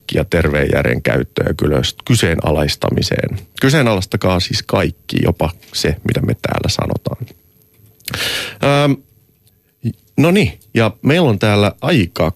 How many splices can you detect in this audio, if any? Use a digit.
0